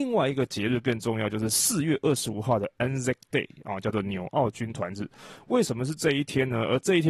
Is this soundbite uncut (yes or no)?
yes